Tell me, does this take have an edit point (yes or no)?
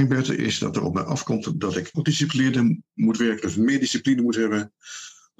yes